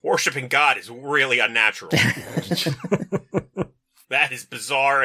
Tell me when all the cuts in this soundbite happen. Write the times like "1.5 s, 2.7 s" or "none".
none